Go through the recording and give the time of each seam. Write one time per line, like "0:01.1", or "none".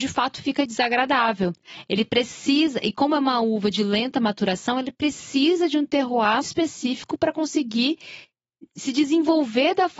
0:06.4